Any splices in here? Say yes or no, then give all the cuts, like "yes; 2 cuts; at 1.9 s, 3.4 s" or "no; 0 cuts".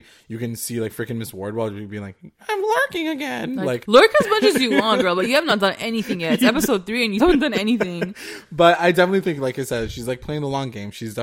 yes; 2 cuts; at 3.8 s, 7.2 s